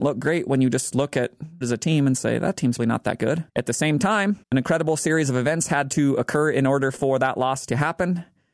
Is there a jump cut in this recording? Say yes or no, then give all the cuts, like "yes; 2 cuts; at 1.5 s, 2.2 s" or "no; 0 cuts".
yes; 4 cuts; at 1.6 s, 2.8 s, 3.5 s, 4.4 s